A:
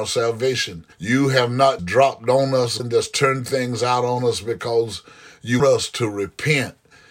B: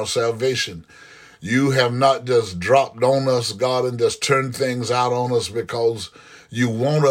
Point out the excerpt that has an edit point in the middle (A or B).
A